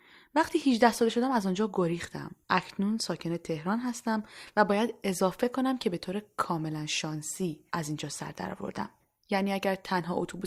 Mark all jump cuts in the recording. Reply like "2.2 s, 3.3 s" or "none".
2.4 s, 7.7 s, 9.0 s